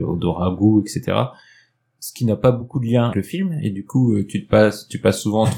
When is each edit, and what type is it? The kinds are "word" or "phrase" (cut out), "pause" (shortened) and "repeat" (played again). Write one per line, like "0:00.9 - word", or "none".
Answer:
0:03.1 - word